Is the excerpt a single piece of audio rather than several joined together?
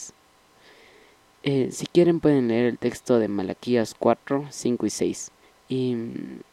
no; 1 cut; at 5.4 s

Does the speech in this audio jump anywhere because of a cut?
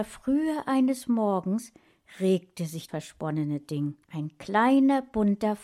yes; 2 cuts; at 2.9 s, 4.0 s

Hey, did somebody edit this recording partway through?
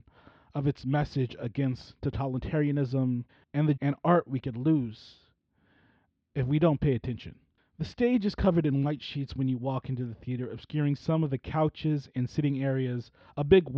yes; 2 cuts; at 3.3 s, 3.8 s

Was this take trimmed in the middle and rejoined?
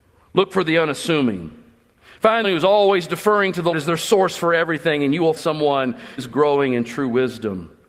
yes; 4 cuts; at 2.4 s, 3.7 s, 5.4 s, 6.2 s

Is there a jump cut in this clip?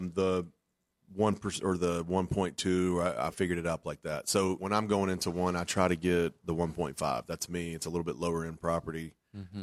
yes; 1 cut; at 4.6 s

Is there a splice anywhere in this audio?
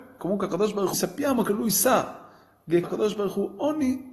yes; 2 cuts; at 0.9 s, 2.8 s

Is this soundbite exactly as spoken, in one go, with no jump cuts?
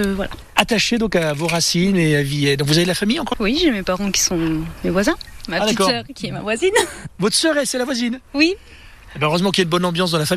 no; 1 cut; at 3.3 s

